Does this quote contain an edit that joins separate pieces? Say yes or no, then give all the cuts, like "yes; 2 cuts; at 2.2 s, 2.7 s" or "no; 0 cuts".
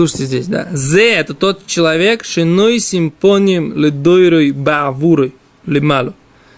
no; 0 cuts